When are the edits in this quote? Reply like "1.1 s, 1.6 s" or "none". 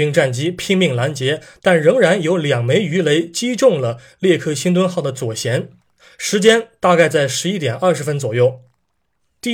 none